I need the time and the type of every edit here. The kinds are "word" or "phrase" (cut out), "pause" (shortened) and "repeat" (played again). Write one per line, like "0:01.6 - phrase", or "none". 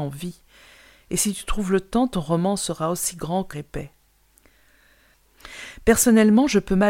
0:03.5 - word